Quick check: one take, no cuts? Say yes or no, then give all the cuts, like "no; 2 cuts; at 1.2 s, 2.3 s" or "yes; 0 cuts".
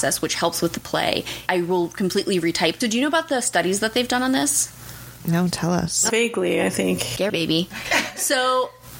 no; 4 cuts; at 1.5 s, 2.8 s, 6.1 s, 7.3 s